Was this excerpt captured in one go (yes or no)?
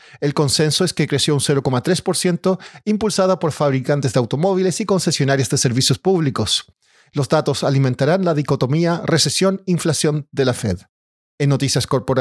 yes